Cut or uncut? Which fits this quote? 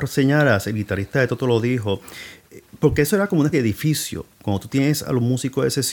cut